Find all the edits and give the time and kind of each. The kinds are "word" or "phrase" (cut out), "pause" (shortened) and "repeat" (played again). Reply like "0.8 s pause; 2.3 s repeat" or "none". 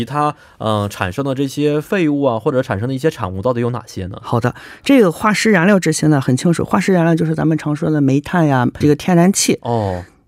8.8 s word